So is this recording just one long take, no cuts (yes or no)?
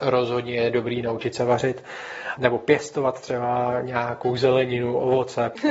yes